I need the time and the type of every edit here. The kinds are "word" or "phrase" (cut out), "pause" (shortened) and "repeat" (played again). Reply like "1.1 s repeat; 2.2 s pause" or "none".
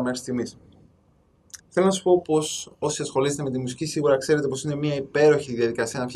1.6 s pause; 2.7 s pause